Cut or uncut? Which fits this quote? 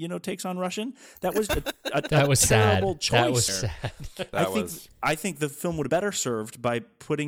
cut